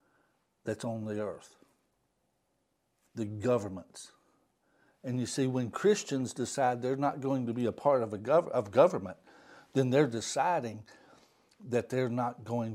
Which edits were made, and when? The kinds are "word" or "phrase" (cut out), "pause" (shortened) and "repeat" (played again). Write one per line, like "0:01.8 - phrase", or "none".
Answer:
none